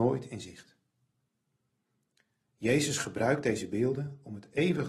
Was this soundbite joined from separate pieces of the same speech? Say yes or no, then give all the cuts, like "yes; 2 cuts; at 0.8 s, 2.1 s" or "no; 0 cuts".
no; 0 cuts